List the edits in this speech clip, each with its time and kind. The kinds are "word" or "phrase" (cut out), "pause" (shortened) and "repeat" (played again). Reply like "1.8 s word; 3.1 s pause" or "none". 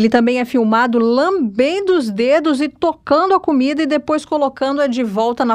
none